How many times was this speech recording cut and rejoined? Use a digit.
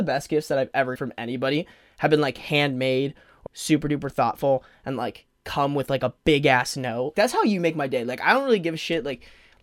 3